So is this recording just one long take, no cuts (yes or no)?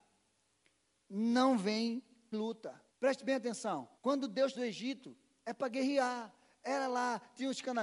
no